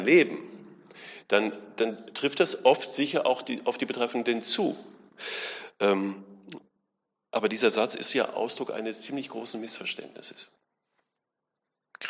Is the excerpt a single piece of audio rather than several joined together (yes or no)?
yes